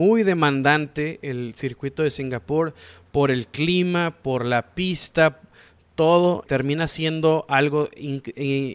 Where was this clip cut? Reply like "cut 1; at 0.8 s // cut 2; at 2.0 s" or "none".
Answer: cut 1; at 6.5 s